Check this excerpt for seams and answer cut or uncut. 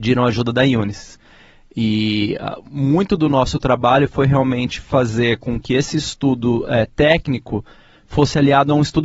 uncut